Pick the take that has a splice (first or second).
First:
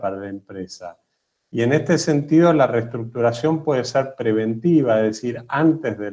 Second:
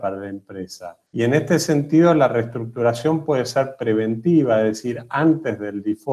second